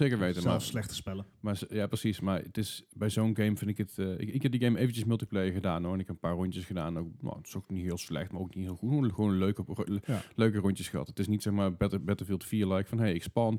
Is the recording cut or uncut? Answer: uncut